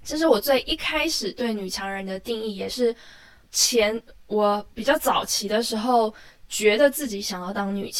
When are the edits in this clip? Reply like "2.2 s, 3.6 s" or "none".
3.4 s

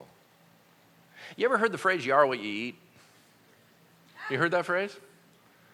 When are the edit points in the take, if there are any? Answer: none

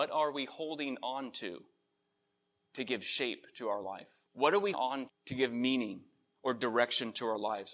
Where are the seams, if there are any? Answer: 4.3 s, 4.7 s, 5.1 s

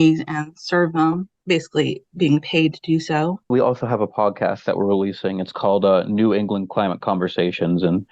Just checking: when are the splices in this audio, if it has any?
1.3 s, 3.4 s

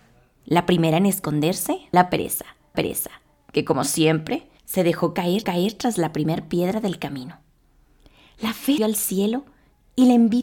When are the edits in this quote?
1.9 s, 2.7 s, 4.6 s, 5.4 s, 8.8 s

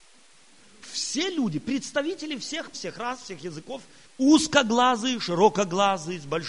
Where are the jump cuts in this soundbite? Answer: 2.7 s, 4.1 s

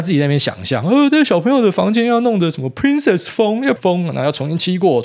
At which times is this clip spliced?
3.8 s

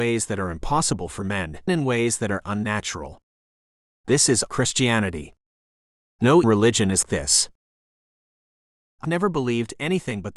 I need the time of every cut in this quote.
1.7 s, 2.4 s, 4.5 s, 6.4 s, 7.0 s, 9.0 s

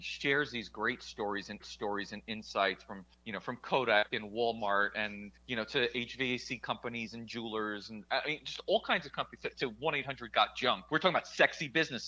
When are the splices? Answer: 1.6 s, 3.1 s, 5.4 s, 10.9 s

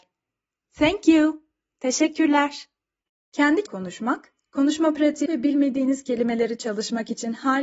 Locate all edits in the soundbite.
3.7 s, 5.3 s

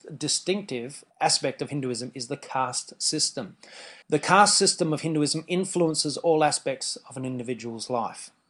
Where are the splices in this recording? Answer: 1.1 s, 4.0 s

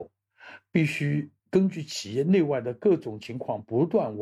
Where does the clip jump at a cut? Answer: 1.4 s

